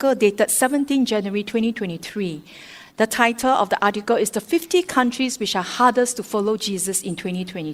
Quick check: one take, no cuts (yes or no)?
yes